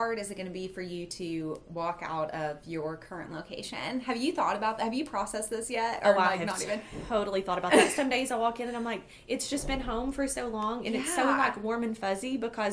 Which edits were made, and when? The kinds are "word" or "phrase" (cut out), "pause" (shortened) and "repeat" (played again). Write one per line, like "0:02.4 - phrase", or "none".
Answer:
none